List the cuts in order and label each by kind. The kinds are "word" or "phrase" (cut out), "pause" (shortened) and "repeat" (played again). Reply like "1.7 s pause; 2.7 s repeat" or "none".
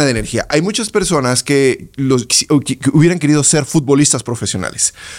2.3 s word